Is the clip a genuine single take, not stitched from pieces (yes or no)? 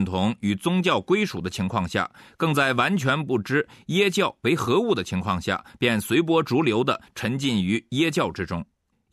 yes